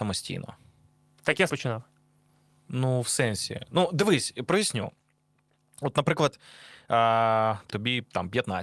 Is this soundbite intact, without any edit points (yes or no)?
no